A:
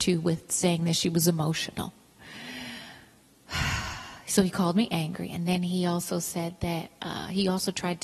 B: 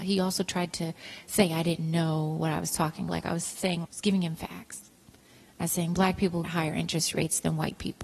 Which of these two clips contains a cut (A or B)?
B